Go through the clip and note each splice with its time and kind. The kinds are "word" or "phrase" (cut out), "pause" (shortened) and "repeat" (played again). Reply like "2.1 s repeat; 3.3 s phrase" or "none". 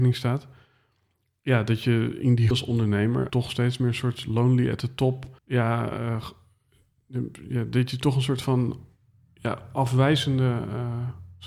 2.5 s word; 3.3 s word; 5.4 s pause